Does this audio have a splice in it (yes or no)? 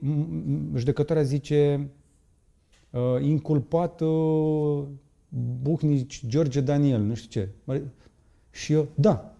no